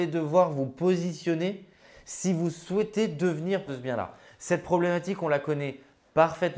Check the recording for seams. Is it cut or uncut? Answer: cut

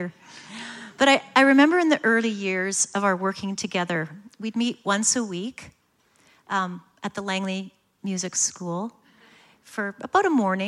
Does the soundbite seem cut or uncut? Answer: uncut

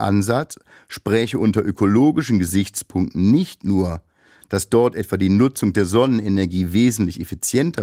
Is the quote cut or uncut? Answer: uncut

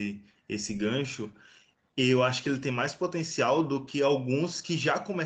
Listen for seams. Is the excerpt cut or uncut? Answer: uncut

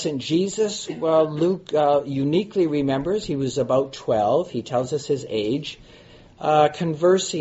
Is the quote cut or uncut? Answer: uncut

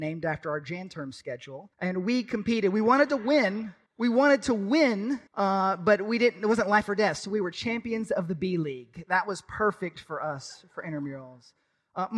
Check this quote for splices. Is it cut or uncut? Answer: cut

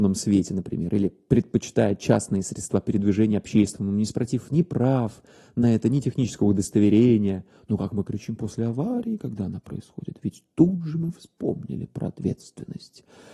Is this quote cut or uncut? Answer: uncut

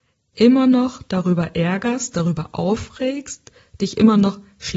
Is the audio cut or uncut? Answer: uncut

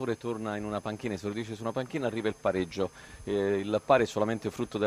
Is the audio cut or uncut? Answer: uncut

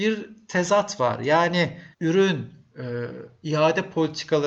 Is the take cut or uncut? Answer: cut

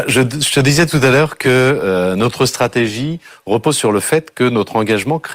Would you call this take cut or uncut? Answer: uncut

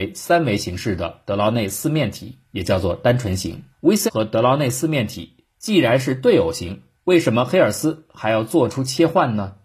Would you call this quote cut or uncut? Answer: cut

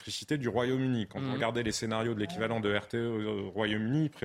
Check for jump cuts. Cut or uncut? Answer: uncut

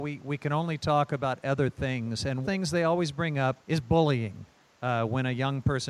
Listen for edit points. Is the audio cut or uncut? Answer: cut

